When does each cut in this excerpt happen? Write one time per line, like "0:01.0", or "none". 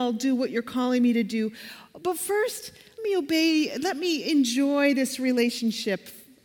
0:03.0